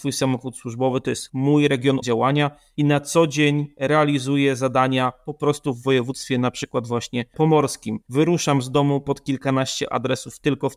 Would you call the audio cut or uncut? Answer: cut